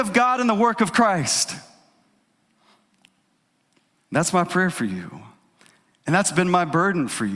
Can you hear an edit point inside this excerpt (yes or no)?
no